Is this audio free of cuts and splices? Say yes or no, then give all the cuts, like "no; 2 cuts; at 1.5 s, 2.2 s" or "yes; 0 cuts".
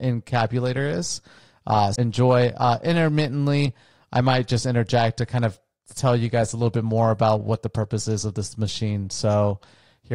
no; 1 cut; at 2.0 s